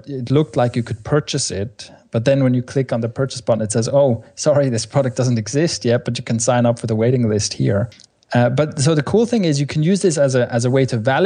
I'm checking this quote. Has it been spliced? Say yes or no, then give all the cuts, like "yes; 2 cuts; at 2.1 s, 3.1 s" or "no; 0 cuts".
no; 0 cuts